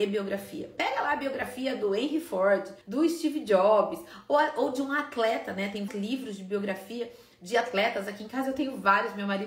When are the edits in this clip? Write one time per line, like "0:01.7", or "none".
0:02.8
0:05.9

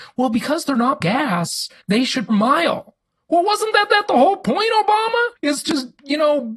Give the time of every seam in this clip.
0:01.0
0:01.8
0:02.3
0:03.9
0:05.4

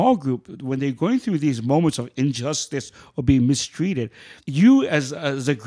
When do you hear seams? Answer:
0:04.4

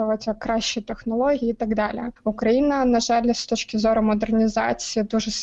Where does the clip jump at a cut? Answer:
none

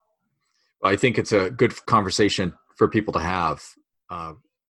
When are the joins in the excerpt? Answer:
none

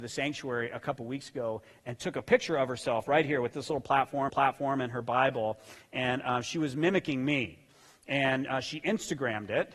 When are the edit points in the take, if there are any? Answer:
0:04.3

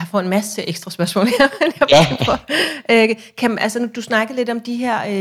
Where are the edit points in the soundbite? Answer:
none

